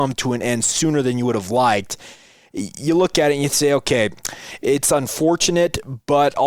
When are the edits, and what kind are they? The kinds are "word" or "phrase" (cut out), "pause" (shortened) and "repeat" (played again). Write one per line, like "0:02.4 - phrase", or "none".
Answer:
none